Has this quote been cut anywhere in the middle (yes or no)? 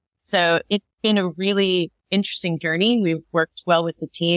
yes